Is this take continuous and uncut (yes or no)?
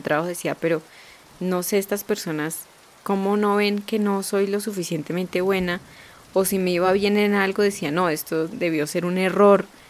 yes